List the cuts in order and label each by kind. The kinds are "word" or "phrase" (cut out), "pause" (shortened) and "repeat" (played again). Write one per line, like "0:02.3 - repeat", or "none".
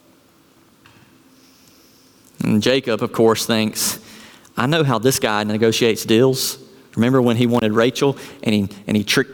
none